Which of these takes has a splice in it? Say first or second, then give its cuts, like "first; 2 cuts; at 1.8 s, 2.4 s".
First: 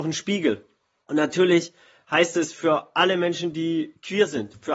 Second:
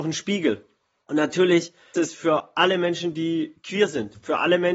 second; 1 cut; at 1.9 s